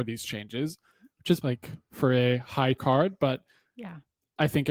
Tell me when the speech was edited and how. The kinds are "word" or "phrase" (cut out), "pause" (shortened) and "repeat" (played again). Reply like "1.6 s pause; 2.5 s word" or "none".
1.4 s phrase; 2.8 s word